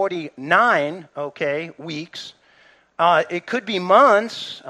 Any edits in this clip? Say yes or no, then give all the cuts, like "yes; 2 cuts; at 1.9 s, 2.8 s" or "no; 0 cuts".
no; 0 cuts